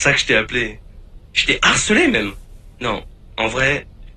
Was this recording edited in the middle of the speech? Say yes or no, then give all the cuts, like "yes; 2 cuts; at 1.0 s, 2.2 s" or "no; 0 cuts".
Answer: no; 0 cuts